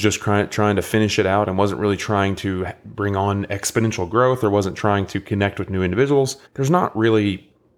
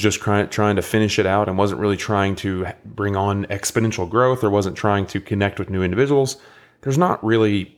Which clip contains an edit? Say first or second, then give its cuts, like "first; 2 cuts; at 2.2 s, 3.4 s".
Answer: first; 1 cut; at 6.5 s